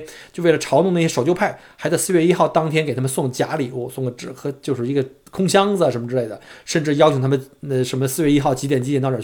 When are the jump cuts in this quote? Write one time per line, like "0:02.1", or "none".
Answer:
none